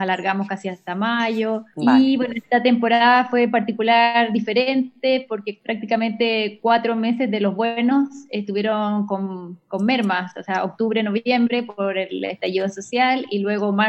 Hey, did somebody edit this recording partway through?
no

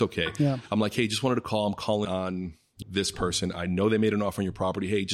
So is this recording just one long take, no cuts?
no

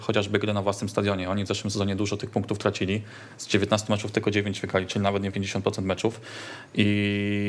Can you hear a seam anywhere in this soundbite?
yes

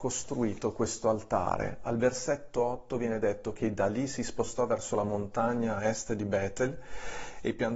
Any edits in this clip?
no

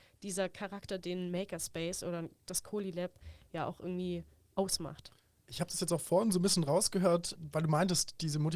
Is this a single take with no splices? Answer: yes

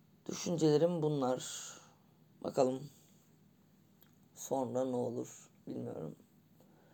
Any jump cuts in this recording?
no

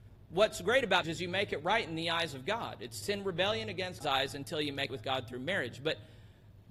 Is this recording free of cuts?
no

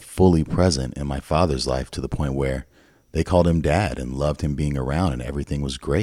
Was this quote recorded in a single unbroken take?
yes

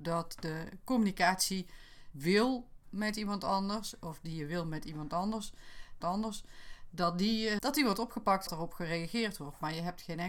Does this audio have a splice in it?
yes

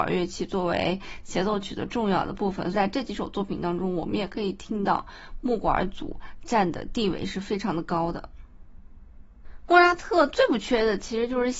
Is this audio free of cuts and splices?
no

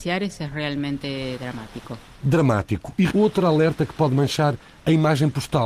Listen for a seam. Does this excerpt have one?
yes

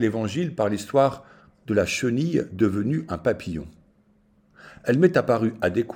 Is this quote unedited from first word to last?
yes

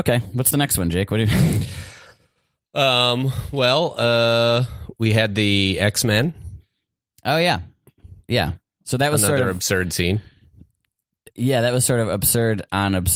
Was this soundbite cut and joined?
no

